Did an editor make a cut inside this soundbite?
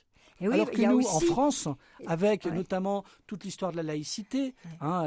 no; 0 cuts

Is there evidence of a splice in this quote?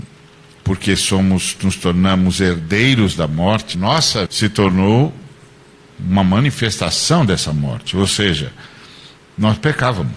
yes; 2 cuts; at 3.7 s, 4.3 s

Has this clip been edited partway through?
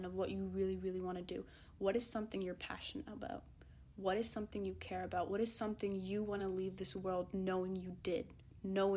no; 0 cuts

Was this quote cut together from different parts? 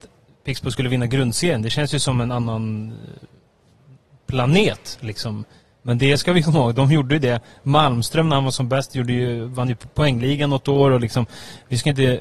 no; 0 cuts

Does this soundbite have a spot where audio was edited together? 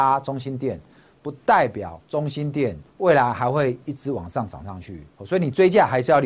yes; 3 cuts; at 2.0 s, 2.9 s, 5.1 s

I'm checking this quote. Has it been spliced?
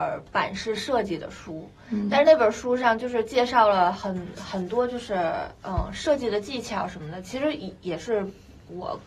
no; 0 cuts

